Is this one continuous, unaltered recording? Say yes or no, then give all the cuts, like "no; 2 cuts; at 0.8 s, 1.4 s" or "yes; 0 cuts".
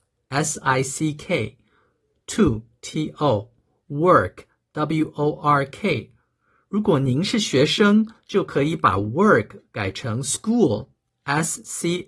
yes; 0 cuts